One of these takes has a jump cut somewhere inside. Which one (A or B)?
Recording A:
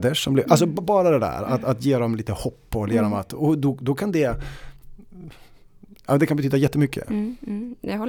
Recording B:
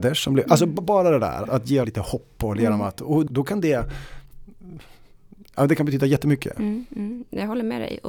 B